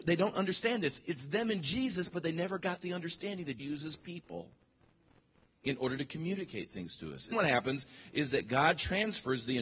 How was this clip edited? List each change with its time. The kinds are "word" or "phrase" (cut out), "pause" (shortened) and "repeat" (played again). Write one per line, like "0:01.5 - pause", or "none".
0:03.6 - word
0:07.3 - word